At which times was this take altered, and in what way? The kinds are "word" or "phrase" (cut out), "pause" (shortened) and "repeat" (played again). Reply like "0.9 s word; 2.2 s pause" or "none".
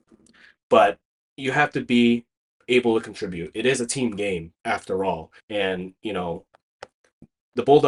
1.2 s pause; 2.4 s pause; 4.6 s pause; 5.4 s pause